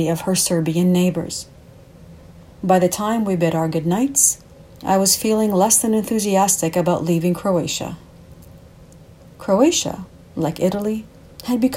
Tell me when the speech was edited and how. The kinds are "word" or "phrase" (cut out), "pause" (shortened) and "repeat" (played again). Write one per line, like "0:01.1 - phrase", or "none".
none